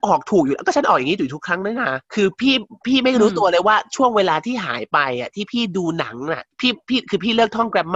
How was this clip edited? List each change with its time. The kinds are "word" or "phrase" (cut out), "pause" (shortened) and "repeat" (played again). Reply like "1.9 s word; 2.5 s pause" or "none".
2.0 s pause; 6.5 s pause